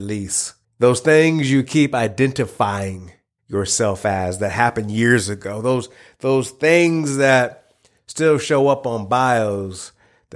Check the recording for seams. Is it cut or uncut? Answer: uncut